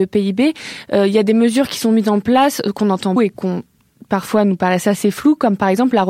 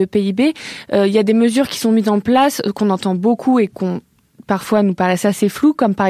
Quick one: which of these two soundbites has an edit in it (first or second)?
first